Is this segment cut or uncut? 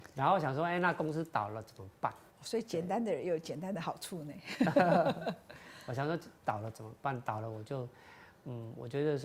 cut